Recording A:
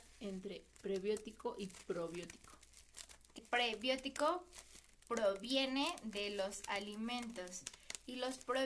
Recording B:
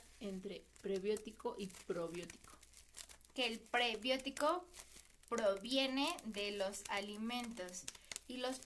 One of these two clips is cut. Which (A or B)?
A